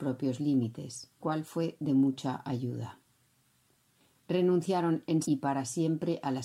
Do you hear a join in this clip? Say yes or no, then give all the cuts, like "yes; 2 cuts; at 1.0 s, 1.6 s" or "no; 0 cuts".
yes; 2 cuts; at 1.2 s, 5.2 s